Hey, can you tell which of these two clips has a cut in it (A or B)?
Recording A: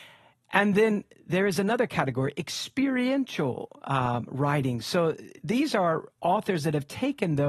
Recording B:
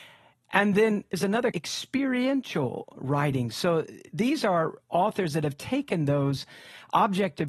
B